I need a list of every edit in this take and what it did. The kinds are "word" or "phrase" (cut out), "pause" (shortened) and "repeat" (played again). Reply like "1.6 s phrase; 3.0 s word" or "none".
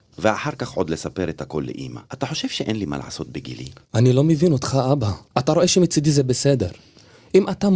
2.1 s pause; 3.8 s pause; 5.3 s pause

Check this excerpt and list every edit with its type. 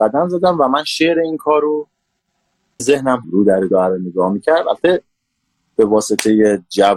2.8 s word; 3.2 s phrase; 3.7 s phrase

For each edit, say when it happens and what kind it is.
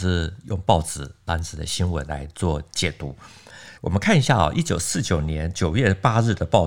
3.7 s pause

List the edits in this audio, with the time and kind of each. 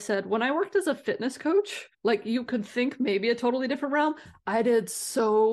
1.9 s pause

